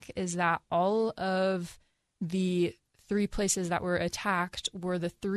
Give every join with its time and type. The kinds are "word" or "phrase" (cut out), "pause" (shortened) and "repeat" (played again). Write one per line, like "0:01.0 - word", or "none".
none